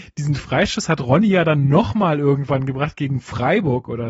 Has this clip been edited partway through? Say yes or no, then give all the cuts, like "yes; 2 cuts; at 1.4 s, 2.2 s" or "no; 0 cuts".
no; 0 cuts